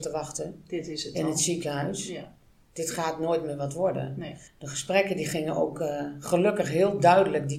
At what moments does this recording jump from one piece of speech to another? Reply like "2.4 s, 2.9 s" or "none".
4.5 s